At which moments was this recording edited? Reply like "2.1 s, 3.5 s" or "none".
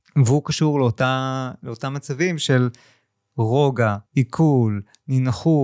4.1 s

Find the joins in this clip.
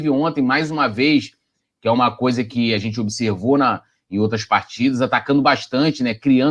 none

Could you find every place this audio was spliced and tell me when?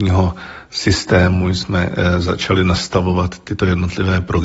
none

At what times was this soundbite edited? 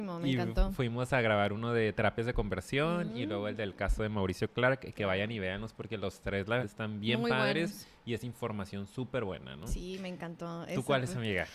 6.6 s

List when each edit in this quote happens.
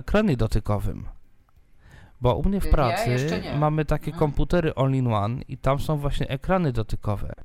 none

